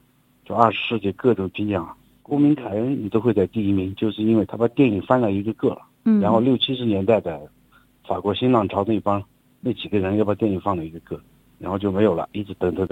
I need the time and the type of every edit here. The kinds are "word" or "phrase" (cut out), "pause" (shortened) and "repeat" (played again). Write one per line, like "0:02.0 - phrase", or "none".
0:09.6 - word